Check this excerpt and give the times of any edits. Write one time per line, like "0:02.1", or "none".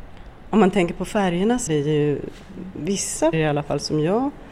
0:01.7
0:03.3